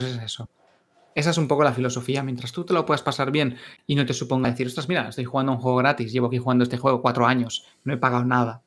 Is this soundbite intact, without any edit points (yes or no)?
no